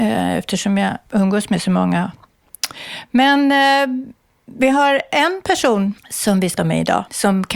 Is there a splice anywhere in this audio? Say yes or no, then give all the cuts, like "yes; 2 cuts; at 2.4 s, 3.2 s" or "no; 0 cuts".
yes; 1 cut; at 6.6 s